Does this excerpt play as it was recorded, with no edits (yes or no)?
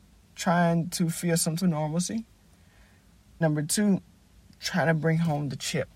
no